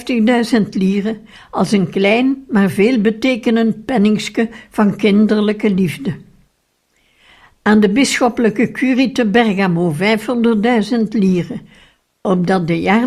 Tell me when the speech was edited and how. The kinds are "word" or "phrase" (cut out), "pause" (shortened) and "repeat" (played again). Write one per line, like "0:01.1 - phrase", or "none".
none